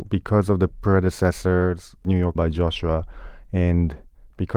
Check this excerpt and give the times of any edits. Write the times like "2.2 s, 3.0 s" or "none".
2.4 s